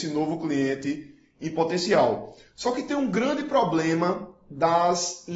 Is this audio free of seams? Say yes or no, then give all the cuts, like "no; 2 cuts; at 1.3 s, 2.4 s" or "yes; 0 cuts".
yes; 0 cuts